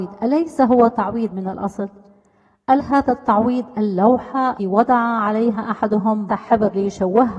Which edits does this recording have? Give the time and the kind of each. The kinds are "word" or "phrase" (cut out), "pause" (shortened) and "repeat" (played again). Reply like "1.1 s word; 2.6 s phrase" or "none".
1.3 s word; 2.8 s word; 4.6 s word; 6.3 s word